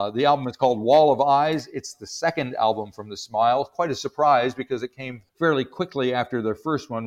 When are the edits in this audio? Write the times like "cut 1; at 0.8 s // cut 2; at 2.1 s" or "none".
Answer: cut 1; at 5.3 s